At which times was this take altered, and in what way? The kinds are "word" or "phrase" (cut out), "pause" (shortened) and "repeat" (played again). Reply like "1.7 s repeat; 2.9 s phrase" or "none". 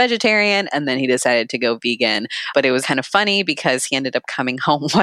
2.8 s word